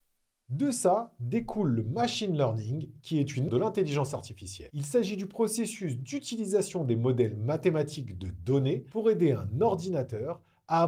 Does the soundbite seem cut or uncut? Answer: cut